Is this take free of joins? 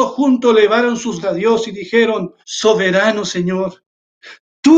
no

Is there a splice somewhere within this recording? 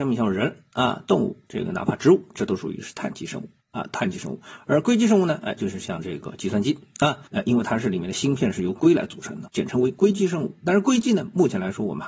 yes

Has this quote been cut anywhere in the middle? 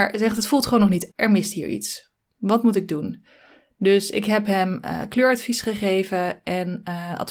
yes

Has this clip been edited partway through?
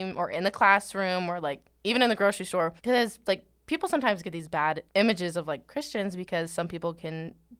yes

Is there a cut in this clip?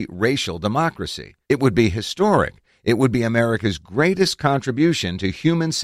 yes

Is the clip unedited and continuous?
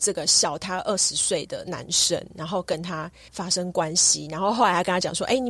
yes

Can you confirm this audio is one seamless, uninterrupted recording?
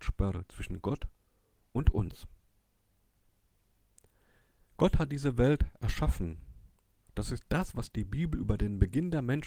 yes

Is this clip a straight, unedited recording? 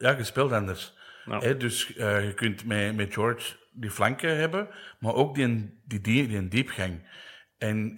yes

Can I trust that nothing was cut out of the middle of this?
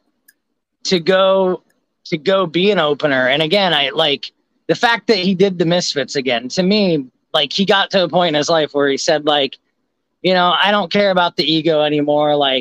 yes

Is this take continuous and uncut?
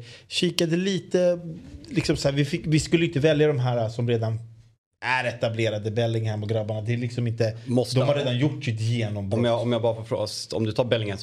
yes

